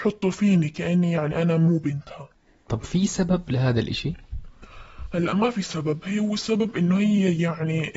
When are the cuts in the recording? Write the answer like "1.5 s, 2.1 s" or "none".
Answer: none